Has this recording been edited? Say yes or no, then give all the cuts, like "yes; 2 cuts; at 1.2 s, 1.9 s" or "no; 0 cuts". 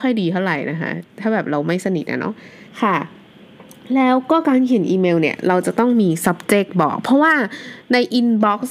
yes; 2 cuts; at 1.1 s, 2.7 s